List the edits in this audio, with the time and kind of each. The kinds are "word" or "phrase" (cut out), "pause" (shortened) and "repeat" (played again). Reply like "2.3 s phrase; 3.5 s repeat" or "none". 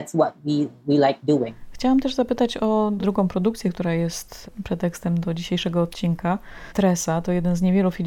5.2 s word